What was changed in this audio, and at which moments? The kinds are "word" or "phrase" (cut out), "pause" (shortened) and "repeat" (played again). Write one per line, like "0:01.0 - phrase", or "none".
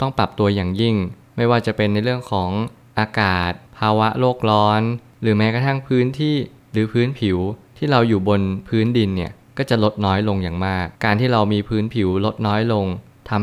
0:10.9 - pause